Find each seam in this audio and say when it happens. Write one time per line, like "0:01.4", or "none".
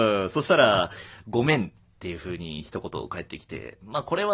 none